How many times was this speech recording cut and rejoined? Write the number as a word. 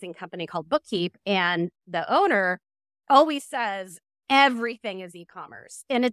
zero